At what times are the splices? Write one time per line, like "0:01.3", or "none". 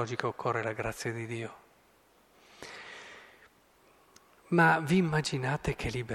none